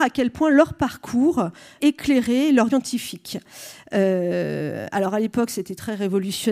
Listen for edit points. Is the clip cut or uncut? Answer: cut